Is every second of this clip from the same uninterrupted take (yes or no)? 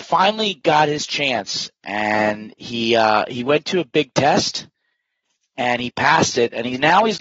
yes